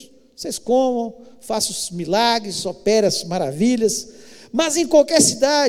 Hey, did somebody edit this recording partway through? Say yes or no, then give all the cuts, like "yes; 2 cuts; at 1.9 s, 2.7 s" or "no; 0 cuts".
no; 0 cuts